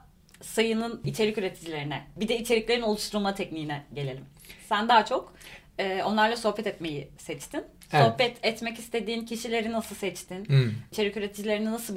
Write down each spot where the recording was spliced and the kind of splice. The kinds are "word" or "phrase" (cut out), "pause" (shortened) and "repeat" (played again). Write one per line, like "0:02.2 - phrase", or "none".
none